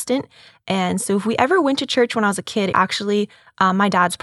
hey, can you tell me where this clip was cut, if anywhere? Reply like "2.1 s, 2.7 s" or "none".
2.7 s